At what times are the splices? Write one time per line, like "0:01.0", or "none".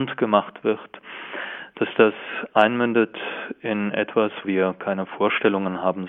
0:04.4